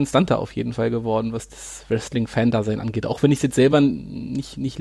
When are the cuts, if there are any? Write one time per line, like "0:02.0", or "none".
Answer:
none

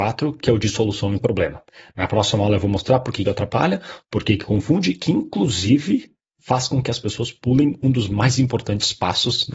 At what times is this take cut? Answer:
0:03.2
0:06.3

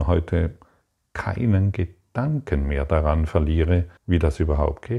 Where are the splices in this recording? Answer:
0:04.0

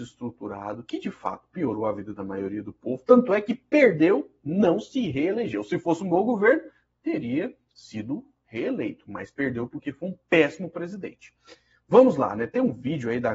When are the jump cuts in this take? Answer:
none

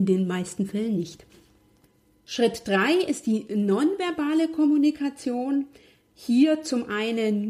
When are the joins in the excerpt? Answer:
none

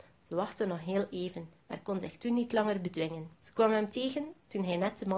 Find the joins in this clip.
0:01.6
0:03.3

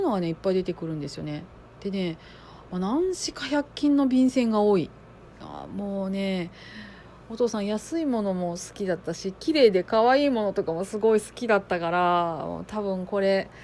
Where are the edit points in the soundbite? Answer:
0:07.2

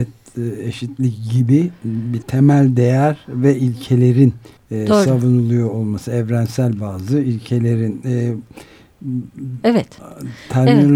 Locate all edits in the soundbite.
0:02.2
0:04.6

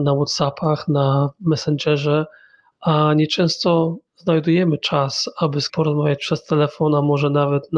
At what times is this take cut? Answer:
0:04.1
0:05.7

